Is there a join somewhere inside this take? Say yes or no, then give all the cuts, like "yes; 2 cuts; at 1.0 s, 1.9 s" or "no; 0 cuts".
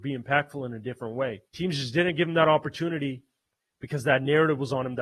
yes; 2 cuts; at 1.5 s, 3.5 s